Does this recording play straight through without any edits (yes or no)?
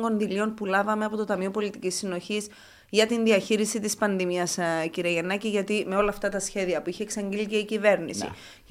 yes